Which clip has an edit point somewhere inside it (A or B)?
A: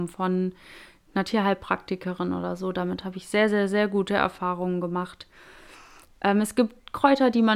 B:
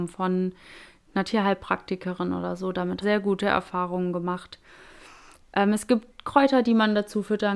B